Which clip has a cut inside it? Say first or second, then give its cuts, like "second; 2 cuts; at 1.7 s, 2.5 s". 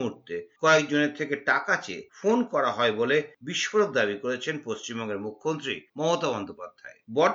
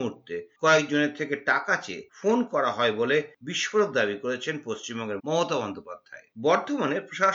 second; 1 cut; at 5.2 s